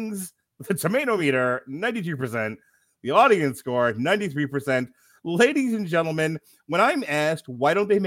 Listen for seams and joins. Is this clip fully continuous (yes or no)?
yes